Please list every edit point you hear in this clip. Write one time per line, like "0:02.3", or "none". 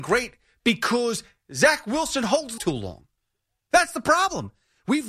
0:02.6